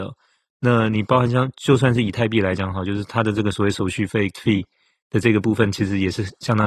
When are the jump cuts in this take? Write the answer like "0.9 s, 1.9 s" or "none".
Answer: 4.3 s